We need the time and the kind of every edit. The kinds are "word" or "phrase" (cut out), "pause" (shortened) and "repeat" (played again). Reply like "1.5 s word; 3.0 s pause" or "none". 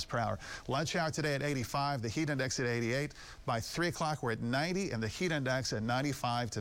none